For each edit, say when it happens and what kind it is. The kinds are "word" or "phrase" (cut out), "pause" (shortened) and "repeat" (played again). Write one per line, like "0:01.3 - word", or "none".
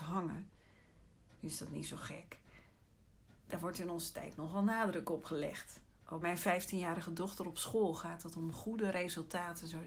0:01.4 - pause
0:03.4 - pause
0:06.2 - word